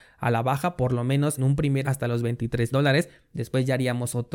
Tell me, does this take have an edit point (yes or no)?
yes